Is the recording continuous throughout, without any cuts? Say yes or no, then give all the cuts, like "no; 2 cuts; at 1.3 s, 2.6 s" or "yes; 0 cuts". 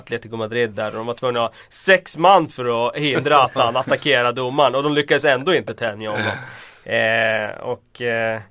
yes; 0 cuts